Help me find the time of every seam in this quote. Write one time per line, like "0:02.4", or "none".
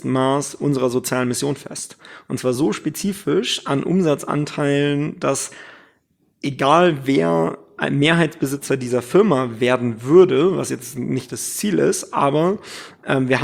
none